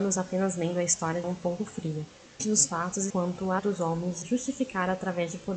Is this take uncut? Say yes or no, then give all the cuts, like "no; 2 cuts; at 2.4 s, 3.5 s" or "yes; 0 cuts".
no; 5 cuts; at 1.2 s, 2.4 s, 3.1 s, 3.6 s, 4.2 s